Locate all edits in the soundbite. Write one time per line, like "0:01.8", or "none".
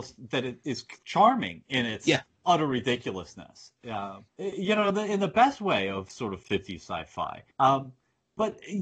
0:02.3
0:04.3
0:07.5